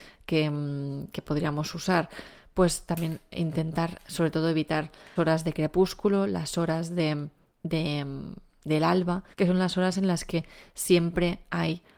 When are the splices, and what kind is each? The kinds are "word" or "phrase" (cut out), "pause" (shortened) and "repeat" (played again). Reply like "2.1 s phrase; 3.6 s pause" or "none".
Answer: 5.2 s word; 9.3 s pause